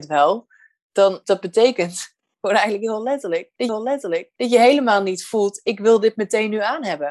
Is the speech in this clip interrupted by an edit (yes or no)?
yes